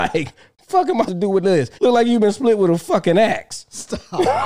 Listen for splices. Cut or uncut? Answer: cut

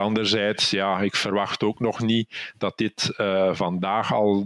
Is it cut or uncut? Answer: uncut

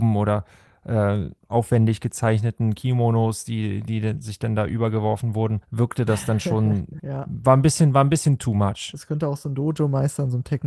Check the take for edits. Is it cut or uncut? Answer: cut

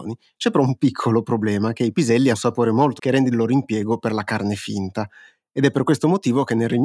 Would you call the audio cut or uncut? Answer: cut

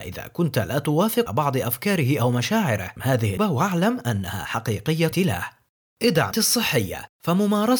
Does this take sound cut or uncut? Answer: cut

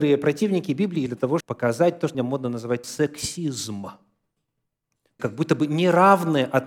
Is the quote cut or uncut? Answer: cut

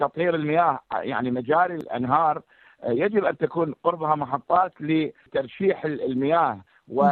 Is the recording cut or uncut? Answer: uncut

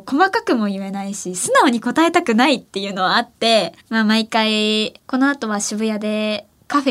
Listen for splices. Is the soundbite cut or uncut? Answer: cut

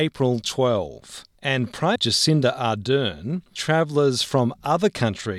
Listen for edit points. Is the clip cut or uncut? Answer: cut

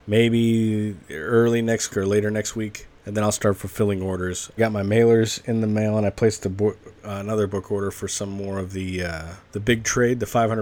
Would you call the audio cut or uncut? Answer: cut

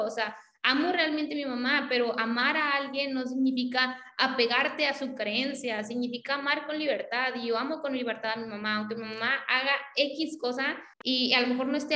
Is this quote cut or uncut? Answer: cut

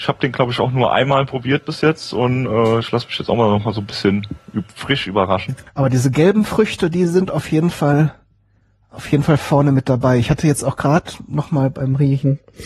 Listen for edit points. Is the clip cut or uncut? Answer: uncut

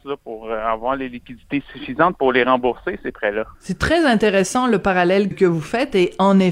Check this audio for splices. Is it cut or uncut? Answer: cut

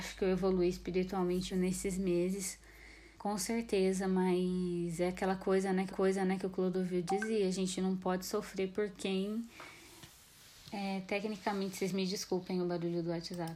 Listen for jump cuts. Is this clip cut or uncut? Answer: cut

